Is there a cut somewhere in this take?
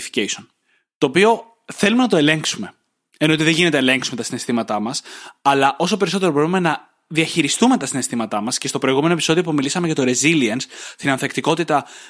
no; 0 cuts

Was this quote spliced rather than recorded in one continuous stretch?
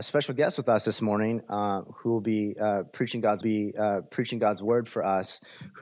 yes; 1 cut; at 3.4 s

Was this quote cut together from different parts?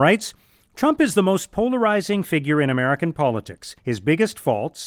yes; 1 cut; at 3.8 s

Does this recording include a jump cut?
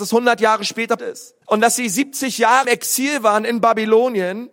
yes; 3 cuts; at 1.0 s, 1.4 s, 2.6 s

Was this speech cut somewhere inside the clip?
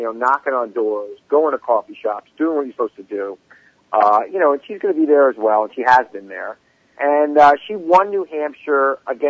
no; 0 cuts

